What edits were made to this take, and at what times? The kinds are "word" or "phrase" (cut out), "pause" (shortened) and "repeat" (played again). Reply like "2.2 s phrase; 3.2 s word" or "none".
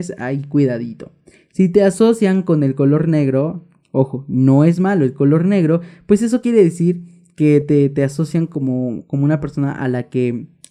none

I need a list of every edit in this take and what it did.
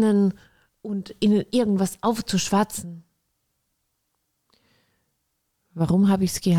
none

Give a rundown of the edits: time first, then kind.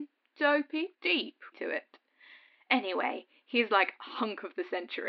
0.9 s word; 1.5 s word

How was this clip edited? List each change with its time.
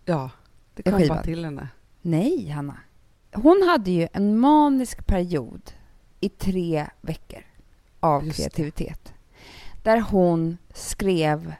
none

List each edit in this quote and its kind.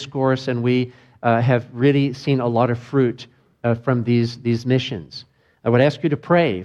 none

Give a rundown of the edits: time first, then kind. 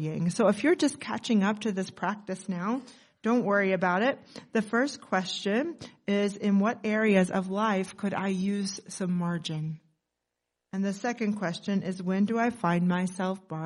none

